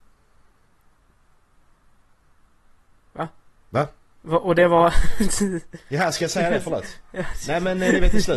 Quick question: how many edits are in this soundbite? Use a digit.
1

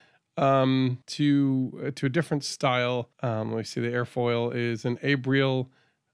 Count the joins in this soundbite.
2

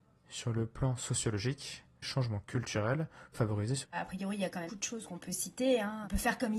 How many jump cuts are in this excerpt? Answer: 4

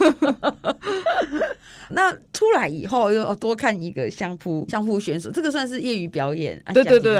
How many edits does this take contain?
2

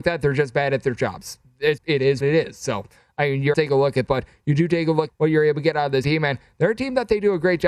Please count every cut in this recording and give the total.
6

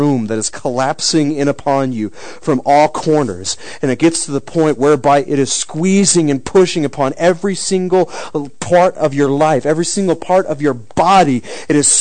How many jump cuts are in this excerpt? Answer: 0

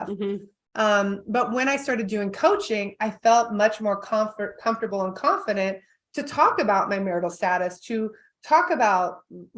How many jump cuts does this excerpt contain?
0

